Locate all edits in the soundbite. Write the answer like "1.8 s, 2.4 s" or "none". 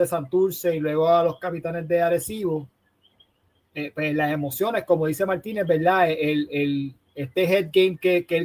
none